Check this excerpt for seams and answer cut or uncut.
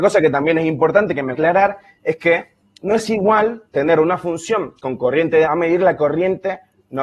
cut